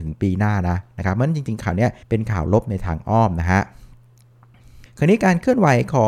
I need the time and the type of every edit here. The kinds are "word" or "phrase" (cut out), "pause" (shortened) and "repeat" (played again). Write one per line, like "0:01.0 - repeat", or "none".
0:02.0 - pause
0:04.9 - pause